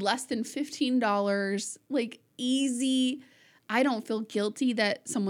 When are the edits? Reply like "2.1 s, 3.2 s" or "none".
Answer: none